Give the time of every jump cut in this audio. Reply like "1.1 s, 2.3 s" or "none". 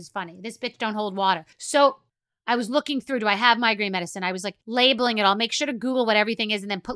1.5 s, 4.6 s